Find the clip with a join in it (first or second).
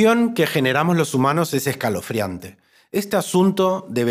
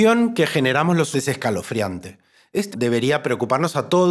second